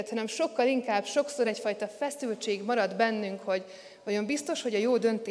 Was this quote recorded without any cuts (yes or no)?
yes